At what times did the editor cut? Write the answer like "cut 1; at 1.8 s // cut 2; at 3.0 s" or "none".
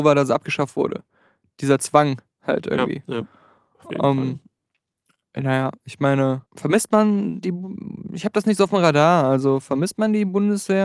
cut 1; at 6.5 s

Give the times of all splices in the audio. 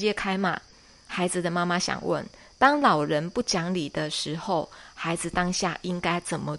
none

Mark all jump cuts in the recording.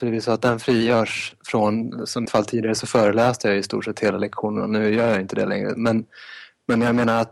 cut 1; at 2.3 s

